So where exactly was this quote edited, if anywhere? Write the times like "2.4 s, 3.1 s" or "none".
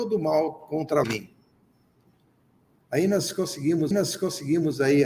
1.0 s, 3.9 s